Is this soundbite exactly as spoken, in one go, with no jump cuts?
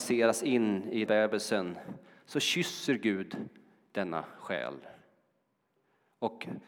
no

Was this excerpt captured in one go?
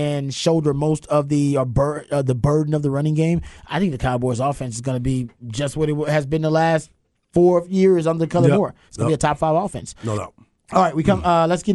yes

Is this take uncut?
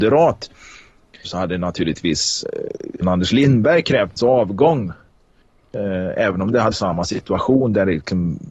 no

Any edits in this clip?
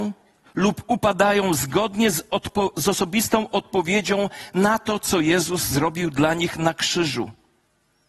no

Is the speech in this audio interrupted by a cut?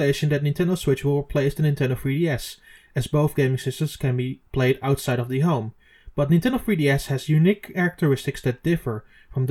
yes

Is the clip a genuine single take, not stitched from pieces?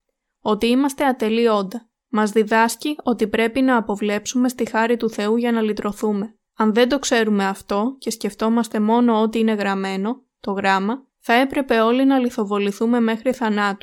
no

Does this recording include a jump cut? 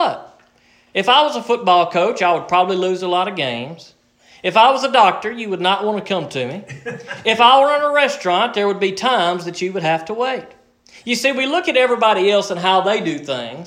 no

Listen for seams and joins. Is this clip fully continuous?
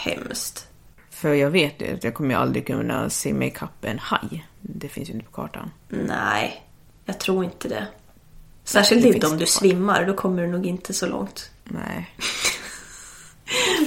no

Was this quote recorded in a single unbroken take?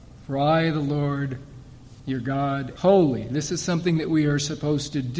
no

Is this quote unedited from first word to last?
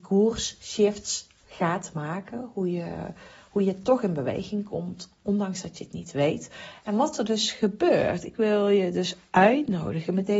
yes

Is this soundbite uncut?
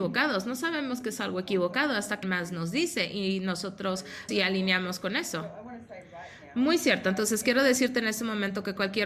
no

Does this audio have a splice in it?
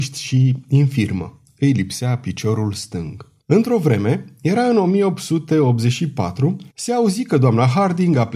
yes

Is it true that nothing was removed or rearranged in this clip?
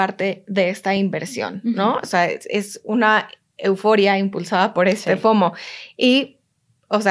yes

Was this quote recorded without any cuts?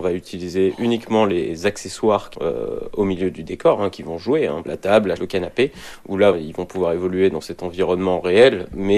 no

